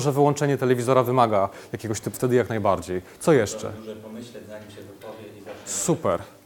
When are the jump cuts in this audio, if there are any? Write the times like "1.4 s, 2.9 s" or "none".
2.1 s